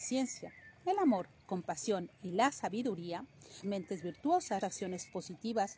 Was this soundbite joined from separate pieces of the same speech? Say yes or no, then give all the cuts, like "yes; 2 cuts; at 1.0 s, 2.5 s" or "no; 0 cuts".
yes; 3 cuts; at 1.4 s, 3.6 s, 4.6 s